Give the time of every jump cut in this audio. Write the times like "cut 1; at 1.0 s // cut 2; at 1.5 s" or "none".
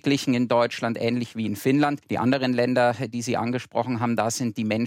cut 1; at 2.0 s